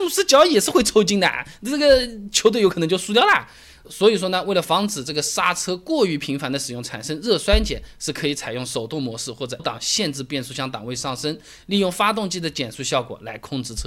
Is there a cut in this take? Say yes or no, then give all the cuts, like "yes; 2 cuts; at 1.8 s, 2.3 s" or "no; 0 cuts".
yes; 1 cut; at 9.6 s